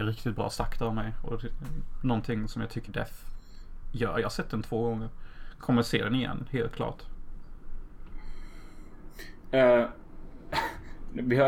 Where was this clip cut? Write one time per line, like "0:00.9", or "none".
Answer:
0:02.9